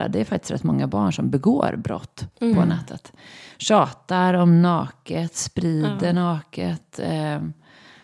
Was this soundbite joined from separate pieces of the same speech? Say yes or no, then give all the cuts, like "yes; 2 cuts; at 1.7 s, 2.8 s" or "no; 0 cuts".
no; 0 cuts